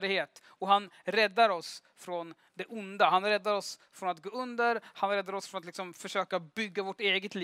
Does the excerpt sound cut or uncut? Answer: uncut